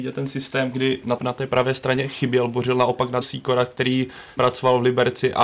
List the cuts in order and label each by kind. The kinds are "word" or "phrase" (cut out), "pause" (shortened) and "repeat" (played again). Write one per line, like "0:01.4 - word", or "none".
0:01.2 - word
0:03.2 - phrase
0:04.4 - phrase